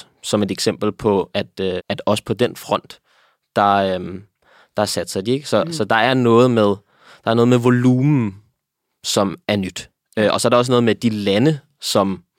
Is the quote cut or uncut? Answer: cut